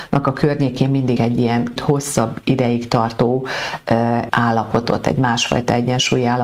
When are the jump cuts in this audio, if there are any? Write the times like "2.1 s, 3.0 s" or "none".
1.2 s, 1.8 s, 4.3 s